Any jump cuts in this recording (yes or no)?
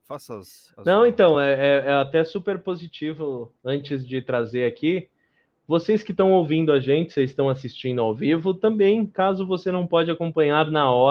no